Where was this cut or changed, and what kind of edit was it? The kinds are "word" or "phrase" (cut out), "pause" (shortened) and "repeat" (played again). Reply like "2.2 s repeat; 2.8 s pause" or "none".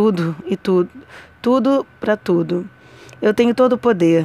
none